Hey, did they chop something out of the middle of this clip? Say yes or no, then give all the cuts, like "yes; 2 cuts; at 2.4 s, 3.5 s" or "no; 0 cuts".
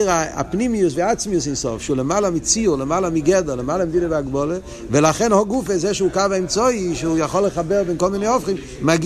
no; 0 cuts